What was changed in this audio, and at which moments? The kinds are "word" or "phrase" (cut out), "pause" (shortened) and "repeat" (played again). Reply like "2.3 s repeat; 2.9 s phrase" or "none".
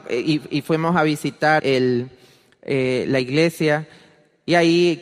1.6 s word